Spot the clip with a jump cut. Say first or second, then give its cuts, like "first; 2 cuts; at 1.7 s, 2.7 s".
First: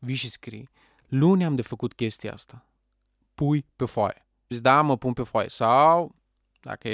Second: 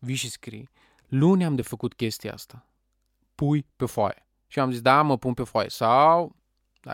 first; 1 cut; at 4.5 s